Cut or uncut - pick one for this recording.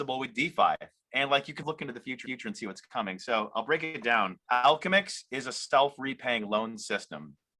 cut